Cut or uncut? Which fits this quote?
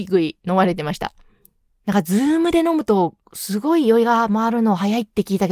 uncut